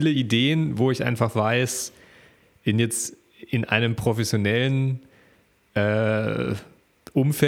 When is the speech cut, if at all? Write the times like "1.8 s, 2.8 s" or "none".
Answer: none